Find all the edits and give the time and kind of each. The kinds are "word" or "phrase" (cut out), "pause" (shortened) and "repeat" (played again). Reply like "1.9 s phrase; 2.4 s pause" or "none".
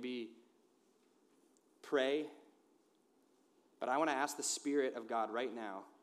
none